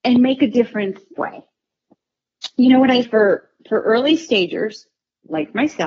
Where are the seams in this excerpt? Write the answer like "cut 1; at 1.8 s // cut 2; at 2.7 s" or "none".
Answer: cut 1; at 1.2 s // cut 2; at 3.0 s